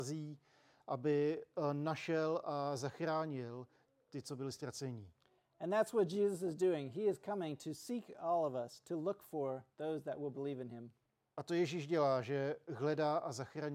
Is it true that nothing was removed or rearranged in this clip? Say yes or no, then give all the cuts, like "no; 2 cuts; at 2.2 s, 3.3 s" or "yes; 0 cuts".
yes; 0 cuts